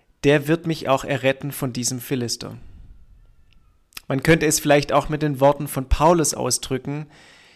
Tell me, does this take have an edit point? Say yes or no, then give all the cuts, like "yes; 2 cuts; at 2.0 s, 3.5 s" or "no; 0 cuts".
no; 0 cuts